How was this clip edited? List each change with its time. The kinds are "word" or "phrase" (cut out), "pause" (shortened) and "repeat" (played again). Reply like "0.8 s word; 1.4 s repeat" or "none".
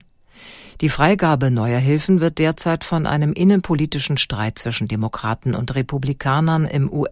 none